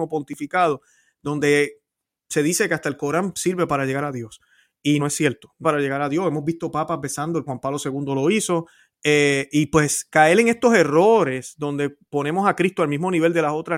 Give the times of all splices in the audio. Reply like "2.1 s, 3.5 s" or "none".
5.0 s, 5.6 s, 7.5 s